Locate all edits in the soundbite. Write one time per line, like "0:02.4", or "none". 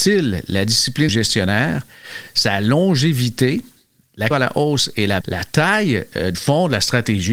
0:01.1
0:04.3
0:05.2
0:06.3